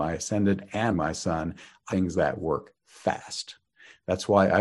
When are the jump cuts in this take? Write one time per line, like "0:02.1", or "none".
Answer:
0:00.9
0:01.9